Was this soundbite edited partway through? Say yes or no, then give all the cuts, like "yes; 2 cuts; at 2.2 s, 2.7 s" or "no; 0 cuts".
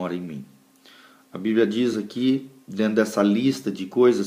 no; 0 cuts